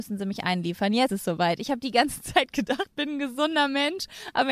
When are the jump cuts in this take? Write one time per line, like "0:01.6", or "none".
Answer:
0:01.1
0:02.9